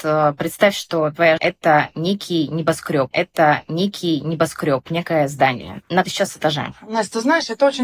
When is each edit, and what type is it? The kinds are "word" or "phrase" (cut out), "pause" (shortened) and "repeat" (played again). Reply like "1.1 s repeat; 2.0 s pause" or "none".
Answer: 1.4 s word; 3.1 s repeat; 6.0 s word

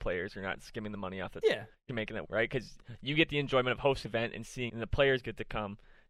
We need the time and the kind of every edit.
1.4 s word; 1.9 s word; 2.2 s word; 4.1 s word; 4.7 s word

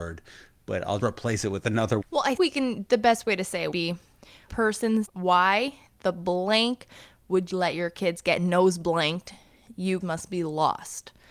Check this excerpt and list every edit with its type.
1.0 s word; 2.0 s word; 2.4 s word; 3.7 s word; 4.5 s word; 5.0 s word; 7.5 s word; 10.0 s word

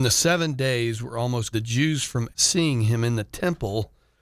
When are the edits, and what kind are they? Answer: 1.5 s word; 2.3 s word

